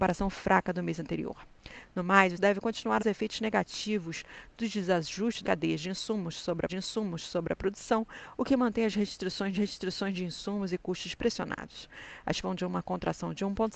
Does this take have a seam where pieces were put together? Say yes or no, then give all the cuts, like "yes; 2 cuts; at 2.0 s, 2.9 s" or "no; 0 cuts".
yes; 6 cuts; at 2.4 s, 3.0 s, 5.4 s, 6.7 s, 9.6 s, 12.4 s